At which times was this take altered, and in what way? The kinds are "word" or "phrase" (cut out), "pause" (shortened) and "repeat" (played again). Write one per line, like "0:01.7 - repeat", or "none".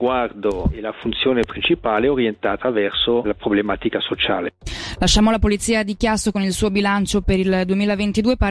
0:03.2 - word